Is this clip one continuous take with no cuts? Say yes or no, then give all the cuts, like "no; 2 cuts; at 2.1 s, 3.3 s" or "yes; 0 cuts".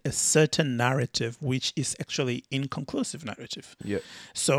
yes; 0 cuts